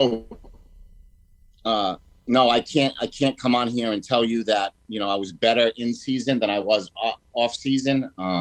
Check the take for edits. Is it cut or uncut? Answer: uncut